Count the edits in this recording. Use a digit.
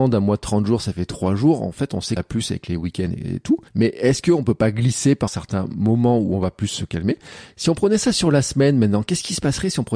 3